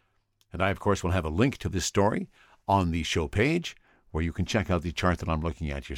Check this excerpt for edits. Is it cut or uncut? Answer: uncut